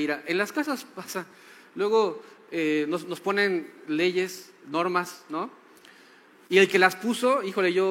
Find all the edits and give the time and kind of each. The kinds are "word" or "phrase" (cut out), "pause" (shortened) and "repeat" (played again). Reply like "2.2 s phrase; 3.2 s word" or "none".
none